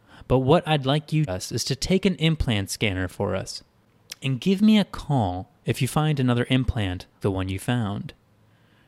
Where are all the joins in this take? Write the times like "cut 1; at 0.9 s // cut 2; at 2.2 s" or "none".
cut 1; at 1.3 s // cut 2; at 7.2 s

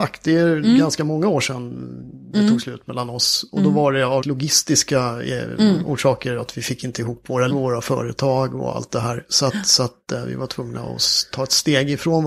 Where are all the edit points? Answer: cut 1; at 4.2 s // cut 2; at 7.5 s

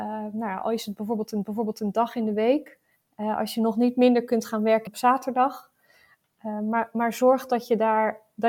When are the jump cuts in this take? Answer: cut 1; at 1.4 s // cut 2; at 2.9 s // cut 3; at 4.9 s

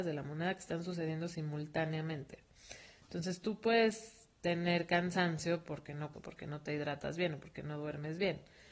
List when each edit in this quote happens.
cut 1; at 4.4 s // cut 2; at 6.1 s

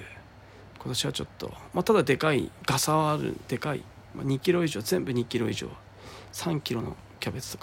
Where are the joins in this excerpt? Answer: cut 1; at 2.6 s // cut 2; at 4.1 s

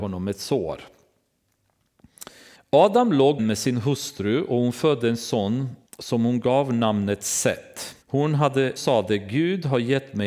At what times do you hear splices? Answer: cut 1; at 2.6 s // cut 2; at 3.4 s // cut 3; at 5.9 s // cut 4; at 8.0 s // cut 5; at 8.8 s

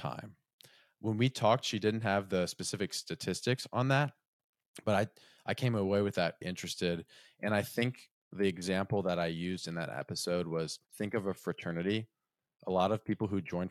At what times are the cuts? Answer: cut 1; at 6.4 s // cut 2; at 10.8 s

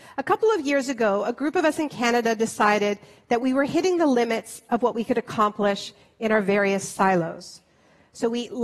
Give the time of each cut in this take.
none

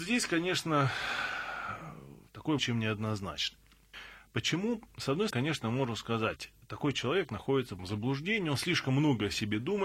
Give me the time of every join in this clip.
cut 1; at 2.6 s // cut 2; at 5.3 s // cut 3; at 6.6 s // cut 4; at 7.8 s

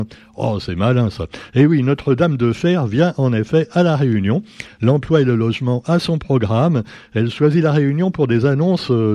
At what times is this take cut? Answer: none

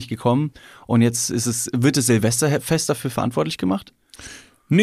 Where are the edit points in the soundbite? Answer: none

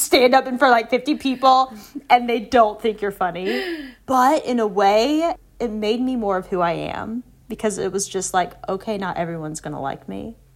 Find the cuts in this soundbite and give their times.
cut 1; at 4.0 s

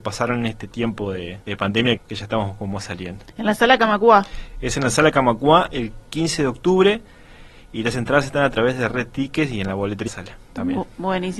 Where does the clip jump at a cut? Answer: cut 1; at 1.4 s // cut 2; at 2.0 s // cut 3; at 10.1 s

